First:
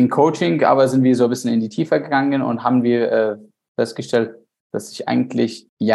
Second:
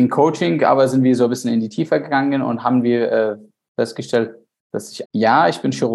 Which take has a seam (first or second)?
second